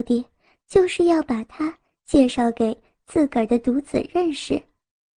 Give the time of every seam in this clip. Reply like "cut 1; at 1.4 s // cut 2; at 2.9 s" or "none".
none